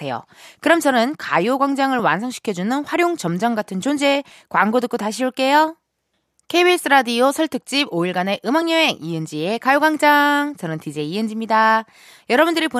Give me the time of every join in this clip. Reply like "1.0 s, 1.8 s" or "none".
none